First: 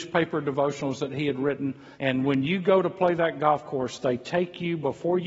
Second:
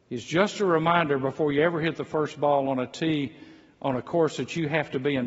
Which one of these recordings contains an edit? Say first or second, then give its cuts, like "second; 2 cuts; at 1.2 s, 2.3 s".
first; 1 cut; at 1.9 s